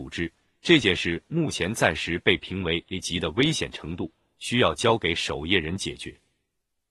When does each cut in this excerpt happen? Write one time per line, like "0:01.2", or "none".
none